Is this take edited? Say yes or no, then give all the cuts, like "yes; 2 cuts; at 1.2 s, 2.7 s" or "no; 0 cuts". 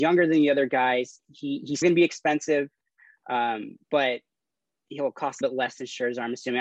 yes; 3 cuts; at 1.8 s, 3.8 s, 5.4 s